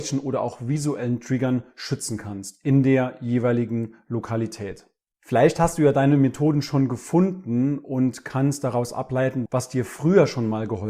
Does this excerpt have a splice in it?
no; 0 cuts

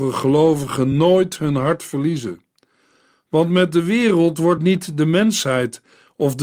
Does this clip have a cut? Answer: no; 0 cuts

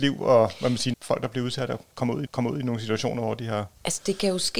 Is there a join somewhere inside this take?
yes; 2 cuts; at 0.9 s, 2.3 s

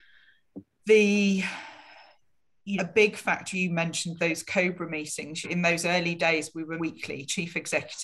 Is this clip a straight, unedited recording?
no; 5 cuts; at 2.8 s, 3.5 s, 4.2 s, 5.4 s, 6.8 s

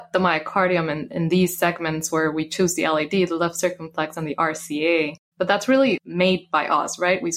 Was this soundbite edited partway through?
no; 0 cuts

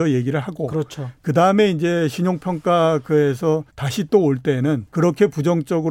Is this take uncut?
no; 2 cuts; at 3.7 s, 4.9 s

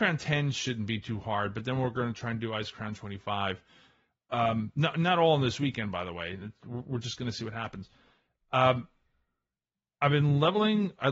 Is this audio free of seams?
yes; 0 cuts

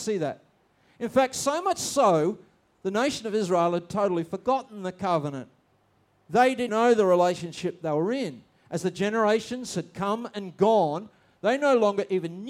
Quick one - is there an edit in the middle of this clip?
yes; 1 cut; at 6.7 s

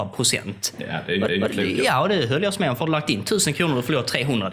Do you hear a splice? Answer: yes; 2 cuts; at 1.3 s, 2.8 s

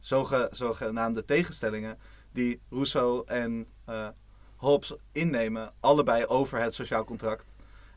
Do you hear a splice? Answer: no; 0 cuts

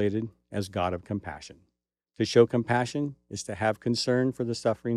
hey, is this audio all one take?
yes; 0 cuts

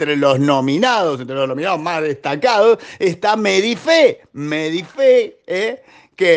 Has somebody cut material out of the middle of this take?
no; 0 cuts

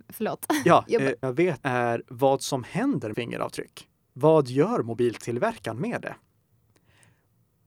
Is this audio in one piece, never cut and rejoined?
no; 3 cuts; at 1.2 s, 1.6 s, 3.1 s

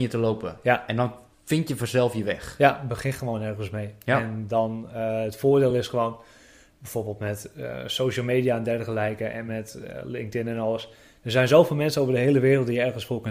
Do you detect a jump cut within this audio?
no; 0 cuts

